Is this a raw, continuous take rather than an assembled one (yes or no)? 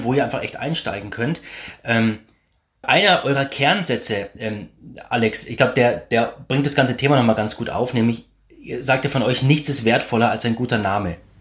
yes